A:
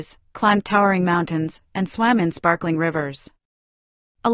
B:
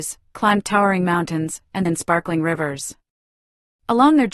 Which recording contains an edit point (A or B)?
B